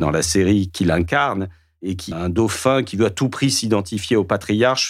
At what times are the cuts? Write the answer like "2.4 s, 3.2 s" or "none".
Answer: 2.1 s